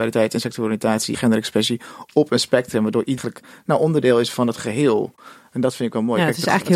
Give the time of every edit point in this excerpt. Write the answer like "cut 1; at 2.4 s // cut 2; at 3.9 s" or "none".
cut 1; at 1.1 s // cut 2; at 3.2 s